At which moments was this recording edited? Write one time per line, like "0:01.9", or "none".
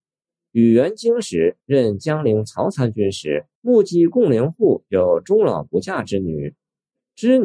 0:01.6
0:03.5